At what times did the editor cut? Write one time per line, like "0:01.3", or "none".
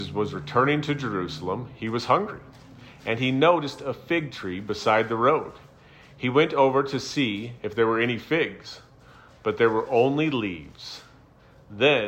none